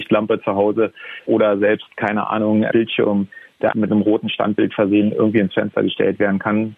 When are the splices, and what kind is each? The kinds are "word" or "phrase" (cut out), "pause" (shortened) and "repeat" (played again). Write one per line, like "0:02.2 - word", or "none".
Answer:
0:01.3 - word
0:02.7 - phrase
0:03.7 - word